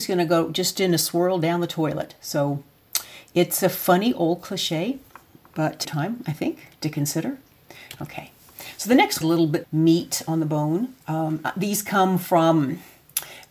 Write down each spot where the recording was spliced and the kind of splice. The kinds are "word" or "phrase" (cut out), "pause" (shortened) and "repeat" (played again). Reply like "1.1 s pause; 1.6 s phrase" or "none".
5.8 s phrase; 9.2 s phrase; 9.6 s word; 11.0 s pause